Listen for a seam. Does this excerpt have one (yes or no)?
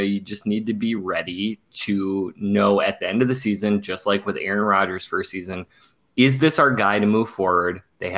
no